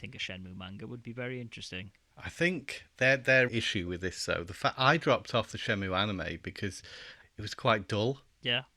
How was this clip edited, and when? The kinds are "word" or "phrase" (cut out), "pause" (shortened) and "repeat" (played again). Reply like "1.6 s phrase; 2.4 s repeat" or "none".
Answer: 3.5 s phrase; 7.2 s word

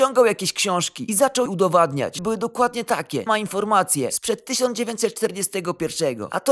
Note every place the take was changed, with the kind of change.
1.5 s word; 2.2 s word; 3.3 s word

